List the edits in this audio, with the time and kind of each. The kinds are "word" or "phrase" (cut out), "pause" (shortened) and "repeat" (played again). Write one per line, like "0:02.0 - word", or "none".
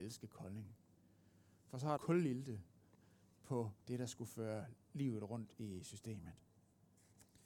0:02.0 - phrase
0:03.8 - pause